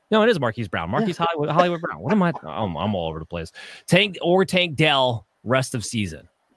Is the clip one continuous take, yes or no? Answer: yes